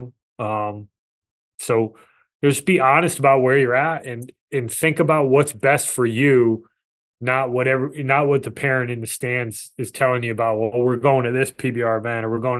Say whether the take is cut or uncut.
uncut